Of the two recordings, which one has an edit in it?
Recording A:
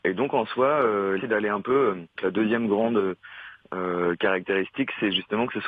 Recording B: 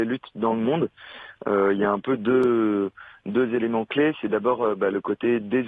A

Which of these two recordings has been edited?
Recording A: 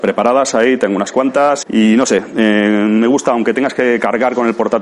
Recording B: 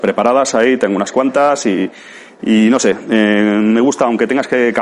A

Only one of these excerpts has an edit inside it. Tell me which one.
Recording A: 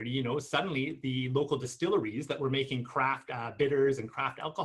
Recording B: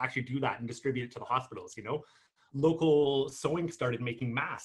B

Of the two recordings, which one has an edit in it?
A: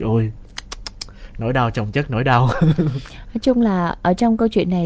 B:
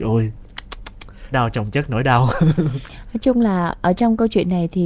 B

